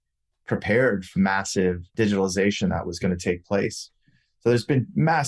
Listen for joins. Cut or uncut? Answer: cut